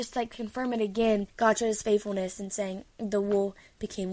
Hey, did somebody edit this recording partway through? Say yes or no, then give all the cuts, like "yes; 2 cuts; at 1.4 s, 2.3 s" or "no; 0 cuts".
yes; 2 cuts; at 1.3 s, 2.9 s